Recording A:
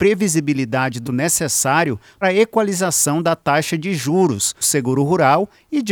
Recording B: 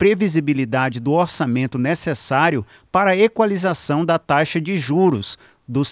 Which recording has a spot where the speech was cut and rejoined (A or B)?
A